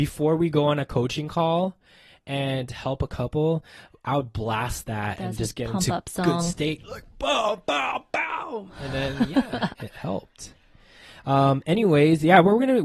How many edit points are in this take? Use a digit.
0